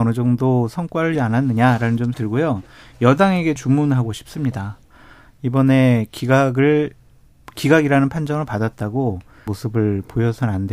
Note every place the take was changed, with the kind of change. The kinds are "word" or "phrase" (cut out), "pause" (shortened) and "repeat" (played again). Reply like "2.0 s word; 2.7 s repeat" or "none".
1.1 s word; 2.1 s word; 3.6 s word; 9.5 s word